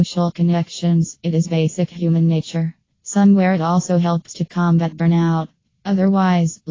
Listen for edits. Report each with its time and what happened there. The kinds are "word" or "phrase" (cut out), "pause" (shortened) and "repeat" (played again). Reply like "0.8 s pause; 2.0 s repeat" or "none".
none